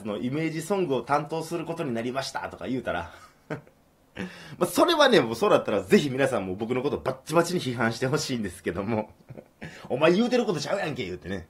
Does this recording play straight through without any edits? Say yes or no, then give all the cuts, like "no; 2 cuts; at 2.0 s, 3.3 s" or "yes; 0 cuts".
yes; 0 cuts